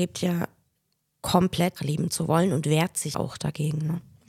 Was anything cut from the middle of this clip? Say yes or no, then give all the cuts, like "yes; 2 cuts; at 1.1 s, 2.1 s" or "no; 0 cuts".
yes; 2 cuts; at 1.8 s, 3.1 s